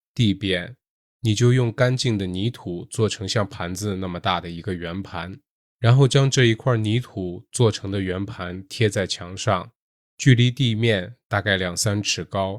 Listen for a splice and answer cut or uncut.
uncut